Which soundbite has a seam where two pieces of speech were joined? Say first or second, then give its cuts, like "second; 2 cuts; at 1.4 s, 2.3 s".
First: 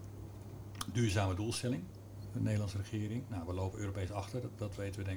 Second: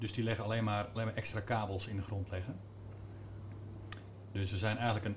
second; 1 cut; at 1.0 s